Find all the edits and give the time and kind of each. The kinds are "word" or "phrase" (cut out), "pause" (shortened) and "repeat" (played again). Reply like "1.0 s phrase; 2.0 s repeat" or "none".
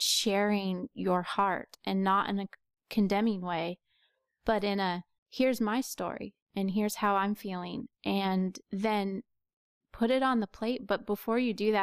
5.2 s pause; 8.6 s pause